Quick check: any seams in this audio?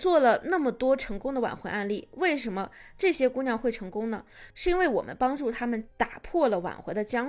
yes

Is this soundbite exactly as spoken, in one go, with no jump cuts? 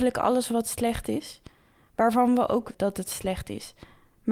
no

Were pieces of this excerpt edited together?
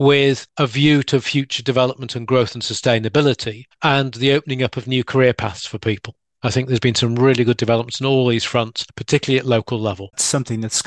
no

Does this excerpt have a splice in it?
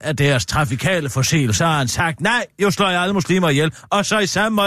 yes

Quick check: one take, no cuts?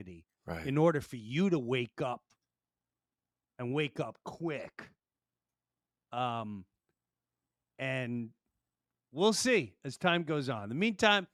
yes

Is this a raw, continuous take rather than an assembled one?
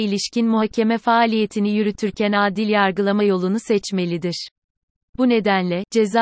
yes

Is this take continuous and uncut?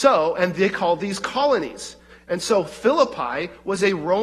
yes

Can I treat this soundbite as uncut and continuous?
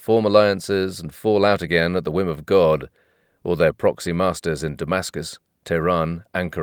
yes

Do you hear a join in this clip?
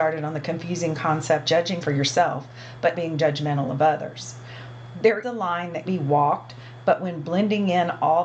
yes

